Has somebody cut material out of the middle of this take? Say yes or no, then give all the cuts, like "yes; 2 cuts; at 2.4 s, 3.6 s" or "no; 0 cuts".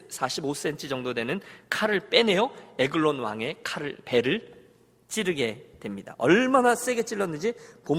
no; 0 cuts